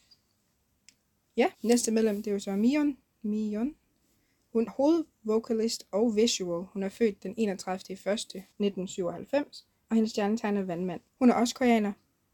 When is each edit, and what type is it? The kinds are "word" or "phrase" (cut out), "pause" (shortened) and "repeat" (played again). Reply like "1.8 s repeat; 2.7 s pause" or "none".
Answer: 1.5 s pause; 4.7 s word; 8.5 s pause; 11.1 s pause